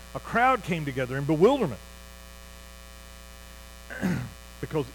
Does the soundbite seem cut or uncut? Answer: uncut